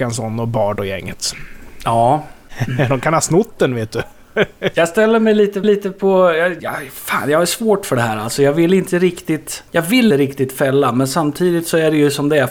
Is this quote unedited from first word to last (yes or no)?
no